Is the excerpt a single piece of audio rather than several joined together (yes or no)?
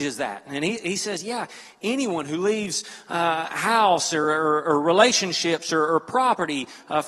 yes